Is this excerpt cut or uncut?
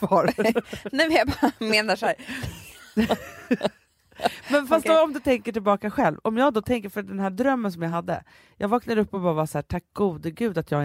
uncut